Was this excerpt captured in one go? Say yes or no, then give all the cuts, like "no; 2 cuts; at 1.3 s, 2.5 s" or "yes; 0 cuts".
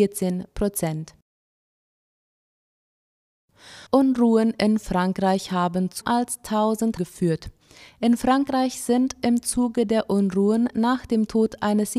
no; 3 cuts; at 3.9 s, 6.0 s, 7.0 s